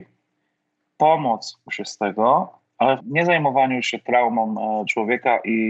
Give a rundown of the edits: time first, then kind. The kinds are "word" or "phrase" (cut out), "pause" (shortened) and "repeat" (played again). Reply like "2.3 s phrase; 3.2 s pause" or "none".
1.7 s word; 3.0 s word